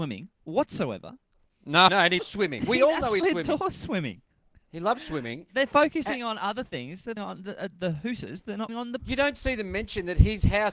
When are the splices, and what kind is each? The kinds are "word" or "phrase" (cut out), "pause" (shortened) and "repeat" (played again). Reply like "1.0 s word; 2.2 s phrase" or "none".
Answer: 1.9 s word; 2.2 s word; 3.2 s word; 7.2 s word; 8.7 s word; 9.0 s word